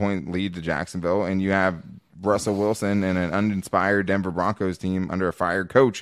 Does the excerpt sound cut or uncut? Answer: uncut